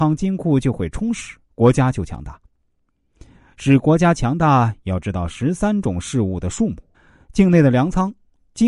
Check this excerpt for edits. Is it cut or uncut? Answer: cut